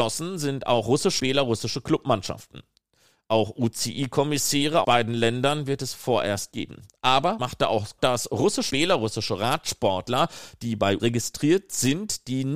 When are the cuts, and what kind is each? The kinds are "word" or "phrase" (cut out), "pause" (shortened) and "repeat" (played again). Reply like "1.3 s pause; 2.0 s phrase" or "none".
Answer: 1.2 s word; 4.8 s word; 6.5 s word; 7.4 s word; 8.0 s word; 8.7 s word; 11.0 s word

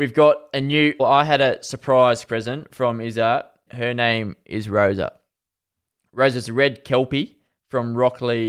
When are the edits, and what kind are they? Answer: 1.0 s word; 2.2 s word; 3.7 s word

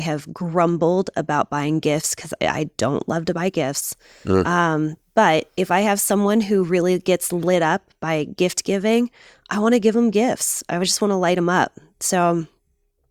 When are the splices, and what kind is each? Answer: none

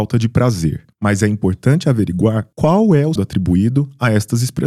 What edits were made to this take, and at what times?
0.9 s pause; 2.5 s pause; 3.2 s word

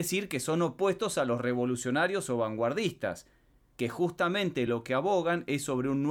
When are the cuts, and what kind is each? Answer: none

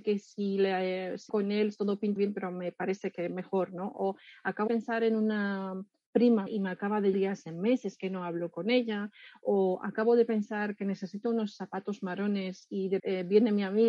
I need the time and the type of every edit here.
1.3 s word; 2.2 s word; 4.7 s word; 6.5 s word; 7.1 s word; 13.0 s word

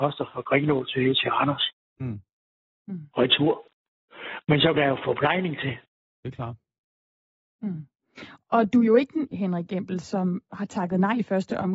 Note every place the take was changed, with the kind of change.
4.7 s word; 9.3 s word; 10.0 s word

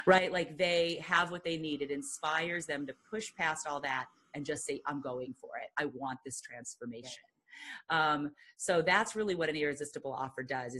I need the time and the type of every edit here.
none

